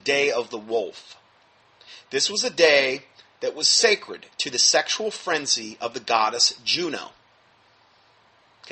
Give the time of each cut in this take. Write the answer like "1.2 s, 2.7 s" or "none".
none